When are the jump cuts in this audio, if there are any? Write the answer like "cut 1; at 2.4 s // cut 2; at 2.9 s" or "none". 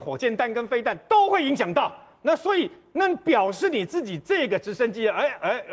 none